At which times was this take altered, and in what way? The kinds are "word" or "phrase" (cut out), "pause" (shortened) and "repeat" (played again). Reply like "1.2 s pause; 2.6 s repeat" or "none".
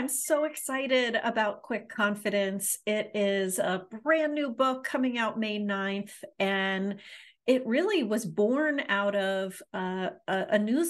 none